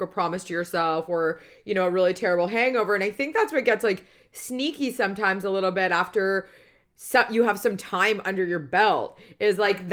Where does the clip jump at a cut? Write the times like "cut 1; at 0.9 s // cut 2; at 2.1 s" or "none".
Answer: none